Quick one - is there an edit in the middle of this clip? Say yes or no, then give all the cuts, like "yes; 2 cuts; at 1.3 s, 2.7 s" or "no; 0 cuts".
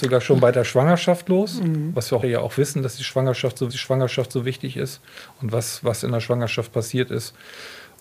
yes; 2 cuts; at 2.2 s, 3.7 s